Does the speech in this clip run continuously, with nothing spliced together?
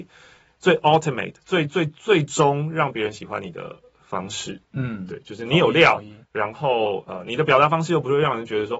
no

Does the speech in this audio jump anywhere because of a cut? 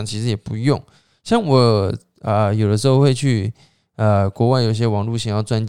no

